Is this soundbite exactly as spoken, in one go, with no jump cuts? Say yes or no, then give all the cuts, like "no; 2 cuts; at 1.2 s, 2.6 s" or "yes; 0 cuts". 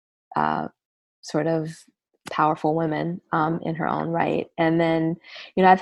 yes; 0 cuts